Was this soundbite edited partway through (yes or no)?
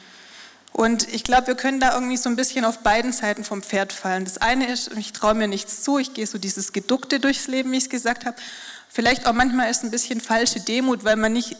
no